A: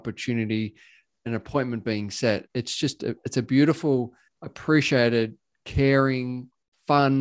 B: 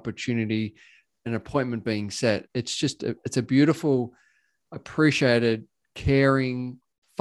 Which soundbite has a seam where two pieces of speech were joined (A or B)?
A